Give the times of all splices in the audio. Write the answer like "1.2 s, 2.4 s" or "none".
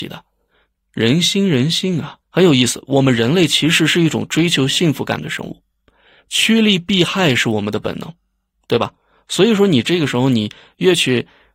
2.2 s